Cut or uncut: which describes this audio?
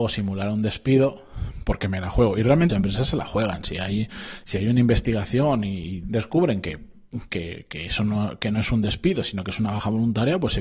cut